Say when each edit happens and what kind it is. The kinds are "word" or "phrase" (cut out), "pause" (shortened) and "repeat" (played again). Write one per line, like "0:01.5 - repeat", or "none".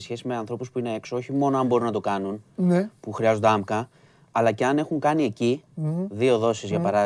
none